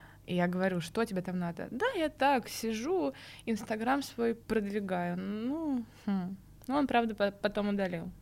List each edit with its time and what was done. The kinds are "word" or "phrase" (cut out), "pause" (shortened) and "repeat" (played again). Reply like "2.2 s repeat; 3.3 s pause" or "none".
4.4 s pause